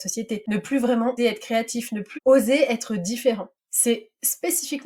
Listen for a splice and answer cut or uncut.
cut